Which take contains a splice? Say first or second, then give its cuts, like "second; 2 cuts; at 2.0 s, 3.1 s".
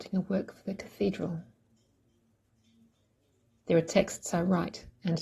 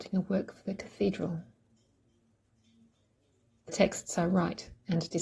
second; 1 cut; at 3.7 s